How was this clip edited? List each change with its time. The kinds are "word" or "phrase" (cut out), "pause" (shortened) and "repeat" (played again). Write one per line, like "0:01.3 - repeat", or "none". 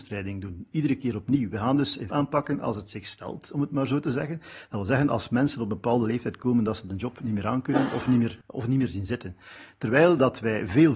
0:02.1 - phrase
0:08.4 - pause